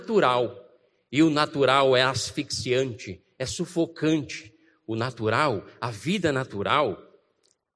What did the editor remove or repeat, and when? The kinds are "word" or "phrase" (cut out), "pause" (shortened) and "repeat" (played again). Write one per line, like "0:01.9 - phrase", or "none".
none